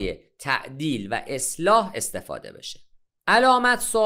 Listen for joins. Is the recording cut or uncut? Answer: uncut